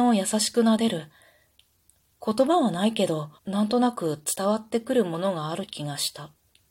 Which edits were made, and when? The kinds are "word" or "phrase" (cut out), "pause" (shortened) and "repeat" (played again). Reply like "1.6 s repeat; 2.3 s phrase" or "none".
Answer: 3.4 s pause